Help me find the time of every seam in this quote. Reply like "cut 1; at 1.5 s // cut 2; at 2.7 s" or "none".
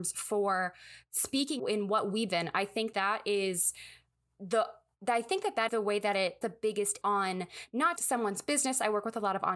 cut 1; at 1.6 s // cut 2; at 2.3 s // cut 3; at 2.9 s // cut 4; at 5.7 s // cut 5; at 6.4 s // cut 6; at 7.0 s // cut 7; at 8.0 s

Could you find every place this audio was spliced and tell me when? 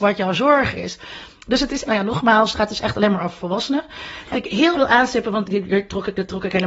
cut 1; at 1.9 s // cut 2; at 4.3 s // cut 3; at 4.7 s // cut 4; at 5.5 s

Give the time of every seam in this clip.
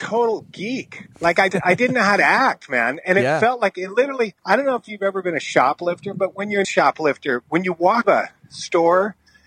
cut 1; at 1.1 s // cut 2; at 1.5 s // cut 3; at 4.4 s // cut 4; at 6.6 s // cut 5; at 8.0 s

